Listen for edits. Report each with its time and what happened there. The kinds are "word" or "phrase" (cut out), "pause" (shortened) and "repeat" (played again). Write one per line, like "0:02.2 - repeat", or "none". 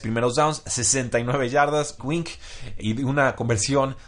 0:02.0 - word
0:02.8 - word